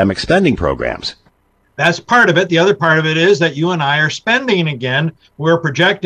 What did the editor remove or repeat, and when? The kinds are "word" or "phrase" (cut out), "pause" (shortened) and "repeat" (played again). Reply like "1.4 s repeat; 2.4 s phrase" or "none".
none

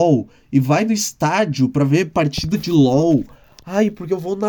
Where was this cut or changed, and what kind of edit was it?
none

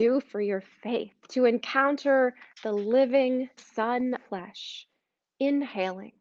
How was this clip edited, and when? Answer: 1.2 s pause; 2.5 s pause; 3.6 s word; 4.2 s phrase

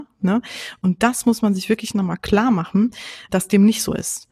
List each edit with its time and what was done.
3.3 s word

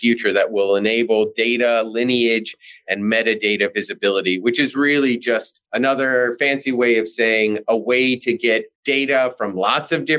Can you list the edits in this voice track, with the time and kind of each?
5.6 s pause; 8.7 s pause

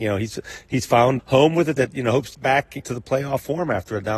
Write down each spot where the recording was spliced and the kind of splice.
1.2 s word; 1.8 s word; 2.3 s word; 2.8 s word

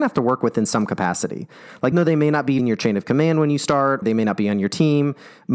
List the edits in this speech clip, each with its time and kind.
1.9 s word; 2.6 s word; 4.0 s word

